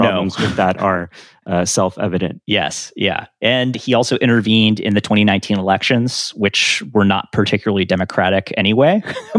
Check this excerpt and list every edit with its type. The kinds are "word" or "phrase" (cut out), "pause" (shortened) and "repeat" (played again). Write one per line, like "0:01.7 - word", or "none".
0:02.4 - pause